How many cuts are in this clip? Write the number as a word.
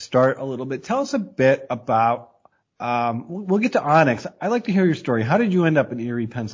zero